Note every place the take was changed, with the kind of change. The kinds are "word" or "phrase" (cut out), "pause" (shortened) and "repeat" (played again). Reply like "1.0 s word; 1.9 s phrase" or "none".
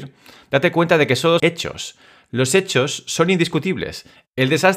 1.4 s phrase